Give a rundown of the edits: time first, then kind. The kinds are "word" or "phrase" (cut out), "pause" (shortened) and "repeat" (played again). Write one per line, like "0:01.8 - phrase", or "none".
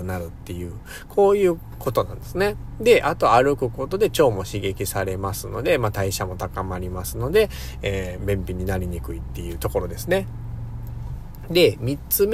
0:08.2 - phrase